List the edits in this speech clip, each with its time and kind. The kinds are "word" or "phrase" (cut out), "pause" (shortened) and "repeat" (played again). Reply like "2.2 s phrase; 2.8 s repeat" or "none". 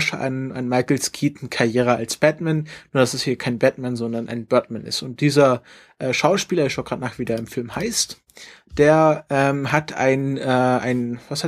none

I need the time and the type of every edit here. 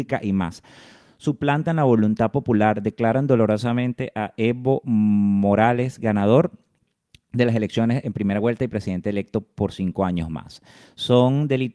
none

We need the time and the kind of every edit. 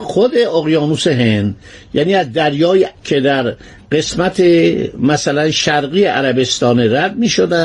2.9 s word

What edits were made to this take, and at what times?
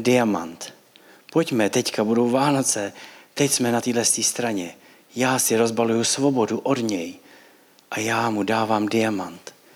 none

